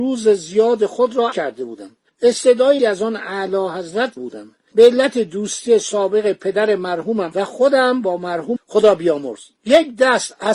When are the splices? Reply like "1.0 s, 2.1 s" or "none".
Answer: 1.3 s, 2.8 s, 4.2 s, 8.6 s